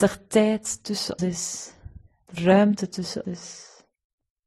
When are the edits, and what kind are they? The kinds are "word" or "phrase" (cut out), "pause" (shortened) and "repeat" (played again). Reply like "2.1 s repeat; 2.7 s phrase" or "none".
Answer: 1.2 s word; 2.4 s word; 3.2 s word